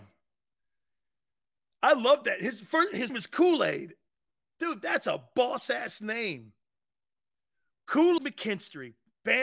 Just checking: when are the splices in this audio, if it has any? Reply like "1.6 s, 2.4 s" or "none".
3.1 s, 8.2 s